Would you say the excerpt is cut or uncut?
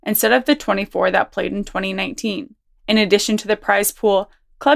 uncut